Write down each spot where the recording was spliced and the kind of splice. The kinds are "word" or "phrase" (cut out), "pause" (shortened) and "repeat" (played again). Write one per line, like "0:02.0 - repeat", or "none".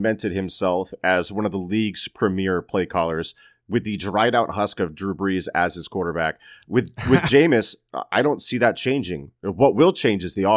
none